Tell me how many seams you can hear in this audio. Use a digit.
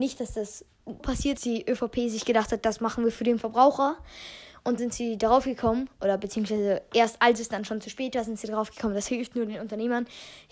3